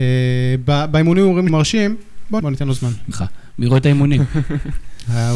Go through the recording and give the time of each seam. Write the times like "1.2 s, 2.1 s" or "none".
1.5 s, 2.4 s, 3.1 s